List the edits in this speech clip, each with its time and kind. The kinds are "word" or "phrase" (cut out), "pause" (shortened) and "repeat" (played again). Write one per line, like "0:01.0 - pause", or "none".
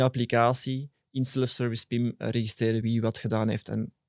none